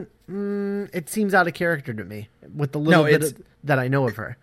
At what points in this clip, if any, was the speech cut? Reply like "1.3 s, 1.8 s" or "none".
3.5 s